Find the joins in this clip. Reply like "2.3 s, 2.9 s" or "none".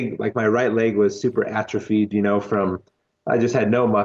none